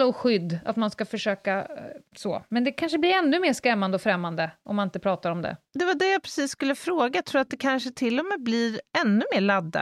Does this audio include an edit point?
yes; 1 cut; at 2.1 s

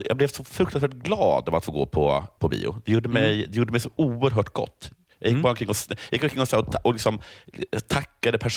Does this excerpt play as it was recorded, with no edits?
no; 1 cut; at 2.4 s

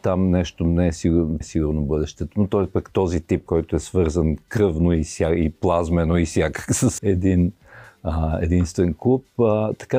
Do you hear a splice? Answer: yes; 3 cuts; at 1.4 s, 3.5 s, 7.0 s

